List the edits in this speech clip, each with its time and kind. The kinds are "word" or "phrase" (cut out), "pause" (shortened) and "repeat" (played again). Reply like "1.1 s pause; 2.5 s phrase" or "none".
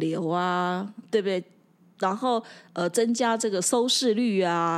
1.1 s word